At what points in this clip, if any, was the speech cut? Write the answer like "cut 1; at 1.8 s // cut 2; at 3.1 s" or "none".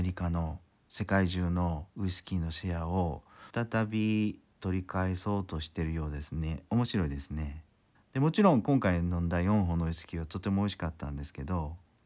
cut 1; at 1.9 s // cut 2; at 3.5 s // cut 3; at 7.9 s